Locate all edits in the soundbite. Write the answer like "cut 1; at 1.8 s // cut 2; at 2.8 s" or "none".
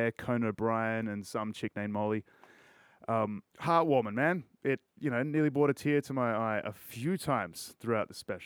cut 1; at 3.5 s // cut 2; at 4.9 s